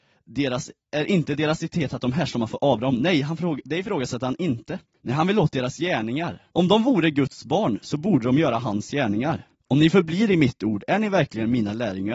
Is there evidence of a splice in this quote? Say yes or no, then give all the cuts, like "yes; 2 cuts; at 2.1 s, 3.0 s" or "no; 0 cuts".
yes; 3 cuts; at 4.9 s, 6.5 s, 9.5 s